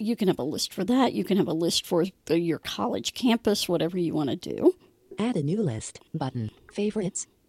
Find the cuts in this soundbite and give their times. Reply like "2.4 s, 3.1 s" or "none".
6.1 s